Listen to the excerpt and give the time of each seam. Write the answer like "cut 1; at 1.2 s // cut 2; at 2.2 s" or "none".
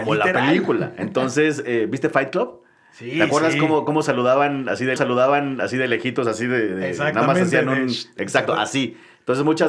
cut 1; at 5.0 s

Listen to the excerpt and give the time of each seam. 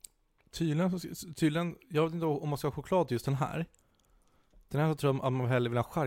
none

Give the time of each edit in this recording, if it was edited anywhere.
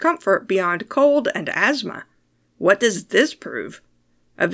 none

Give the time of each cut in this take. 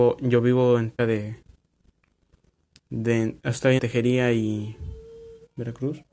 cut 1; at 1.0 s // cut 2; at 3.8 s

